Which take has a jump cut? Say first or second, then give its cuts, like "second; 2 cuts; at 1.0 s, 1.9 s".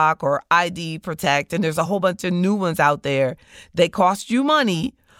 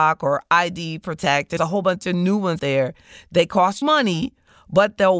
second; 3 cuts; at 1.6 s, 2.6 s, 3.8 s